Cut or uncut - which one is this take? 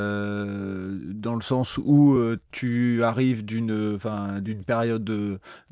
uncut